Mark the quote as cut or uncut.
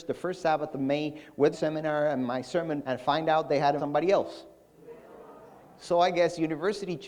cut